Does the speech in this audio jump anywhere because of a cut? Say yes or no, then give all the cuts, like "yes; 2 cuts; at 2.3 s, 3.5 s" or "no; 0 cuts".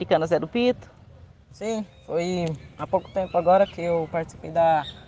no; 0 cuts